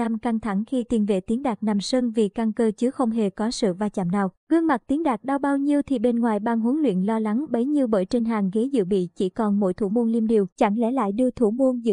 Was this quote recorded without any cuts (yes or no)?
no